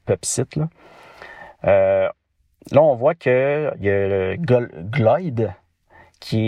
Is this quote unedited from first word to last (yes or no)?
yes